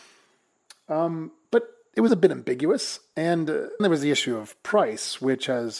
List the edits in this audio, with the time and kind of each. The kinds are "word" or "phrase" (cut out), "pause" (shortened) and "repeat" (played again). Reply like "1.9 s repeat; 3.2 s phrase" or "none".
2.1 s word; 3.8 s word